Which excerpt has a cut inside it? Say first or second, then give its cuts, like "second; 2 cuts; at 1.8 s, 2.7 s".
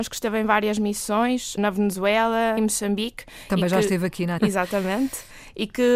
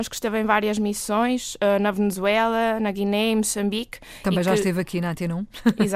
first; 3 cuts; at 1.6 s, 2.6 s, 4.4 s